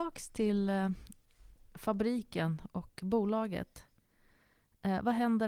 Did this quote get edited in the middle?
no; 0 cuts

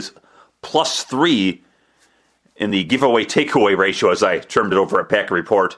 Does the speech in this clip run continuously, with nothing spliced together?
yes; 0 cuts

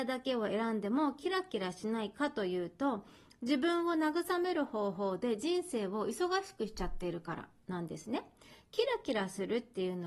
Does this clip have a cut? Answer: no; 0 cuts

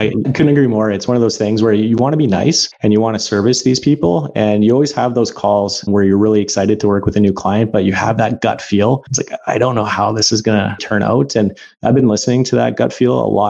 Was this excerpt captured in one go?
no; 1 cut; at 10.8 s

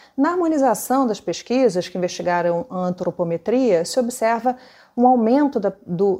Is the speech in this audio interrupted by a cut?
no; 0 cuts

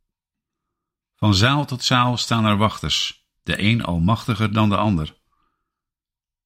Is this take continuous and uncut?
no; 1 cut; at 3.4 s

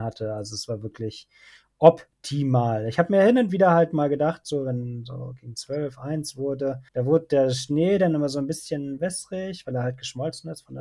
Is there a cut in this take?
yes; 1 cut; at 6.9 s

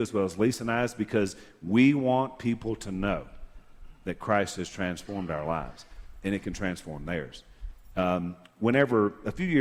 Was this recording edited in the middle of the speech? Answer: no; 0 cuts

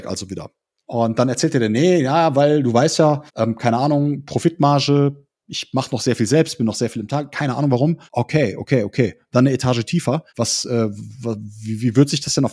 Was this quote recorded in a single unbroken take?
no; 3 cuts; at 3.3 s, 8.1 s, 10.3 s

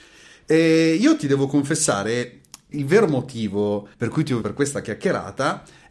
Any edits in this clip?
yes; 3 cuts; at 2.7 s, 3.9 s, 4.4 s

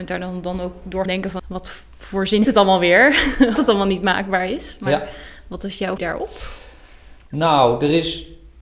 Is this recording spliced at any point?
yes; 5 cuts; at 1.1 s, 1.4 s, 2.4 s, 3.6 s, 6.0 s

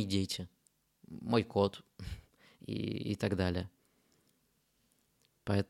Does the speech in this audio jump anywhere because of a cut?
no; 0 cuts

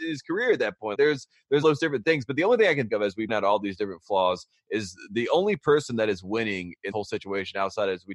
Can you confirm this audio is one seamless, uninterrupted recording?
no; 5 cuts; at 0.9 s, 1.6 s, 2.9 s, 3.3 s, 6.9 s

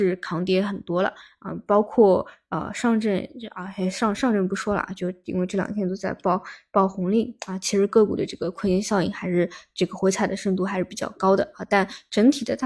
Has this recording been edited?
no; 0 cuts

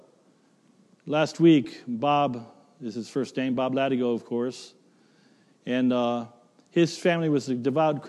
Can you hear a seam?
no; 0 cuts

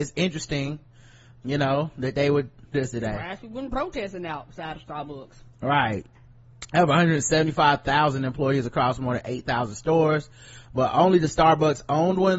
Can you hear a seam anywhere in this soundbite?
yes; 2 cuts; at 1.4 s, 2.7 s

